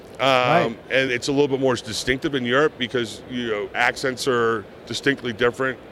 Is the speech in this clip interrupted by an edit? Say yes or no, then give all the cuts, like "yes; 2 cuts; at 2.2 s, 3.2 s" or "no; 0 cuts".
yes; 2 cuts; at 1.1 s, 3.7 s